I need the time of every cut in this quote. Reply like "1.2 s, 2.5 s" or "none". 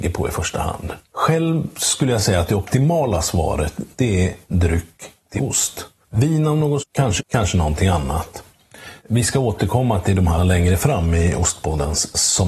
1.0 s, 4.5 s, 5.4 s, 6.8 s, 7.2 s, 9.0 s, 10.4 s